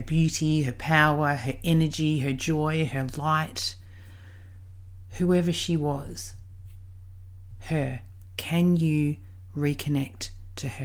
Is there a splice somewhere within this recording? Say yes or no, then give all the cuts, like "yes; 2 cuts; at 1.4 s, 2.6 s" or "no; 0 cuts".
no; 0 cuts